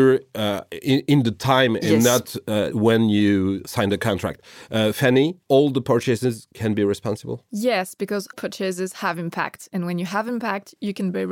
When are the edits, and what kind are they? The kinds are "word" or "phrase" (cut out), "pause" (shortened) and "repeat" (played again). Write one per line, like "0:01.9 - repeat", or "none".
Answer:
0:02.7 - word
0:05.4 - pause
0:08.3 - word

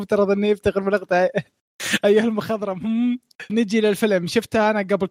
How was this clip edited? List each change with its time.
0:03.5 - word

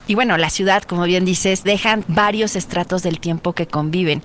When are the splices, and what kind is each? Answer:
0:01.6 - word

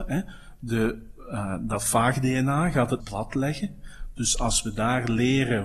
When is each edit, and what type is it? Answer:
0:03.0 - word

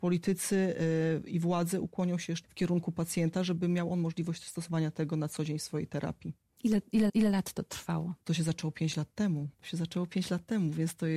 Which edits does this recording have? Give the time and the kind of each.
0:02.4 - word
0:07.1 - repeat
0:08.2 - pause
0:09.5 - pause

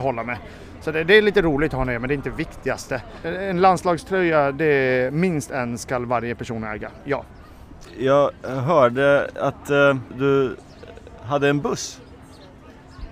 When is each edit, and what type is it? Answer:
none

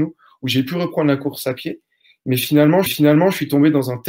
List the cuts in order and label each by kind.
0:02.9 - repeat

